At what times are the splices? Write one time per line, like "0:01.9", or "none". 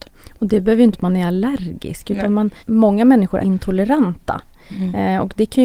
0:00.9
0:02.6
0:03.4